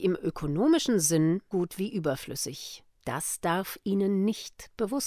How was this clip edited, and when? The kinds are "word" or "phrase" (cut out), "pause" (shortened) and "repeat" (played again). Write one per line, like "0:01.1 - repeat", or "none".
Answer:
0:01.5 - word
0:02.9 - pause